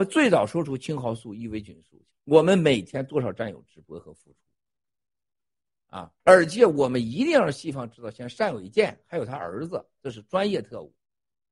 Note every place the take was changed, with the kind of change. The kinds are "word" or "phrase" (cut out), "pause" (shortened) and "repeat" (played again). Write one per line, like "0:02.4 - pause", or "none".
0:02.1 - phrase
0:06.2 - pause